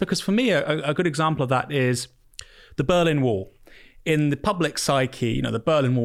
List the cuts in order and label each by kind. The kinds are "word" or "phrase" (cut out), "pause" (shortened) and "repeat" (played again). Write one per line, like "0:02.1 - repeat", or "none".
none